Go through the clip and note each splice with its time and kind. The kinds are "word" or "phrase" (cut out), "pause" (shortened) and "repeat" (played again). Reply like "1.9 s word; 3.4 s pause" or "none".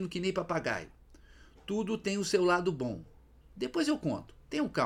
none